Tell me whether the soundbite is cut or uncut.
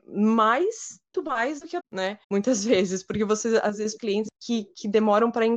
cut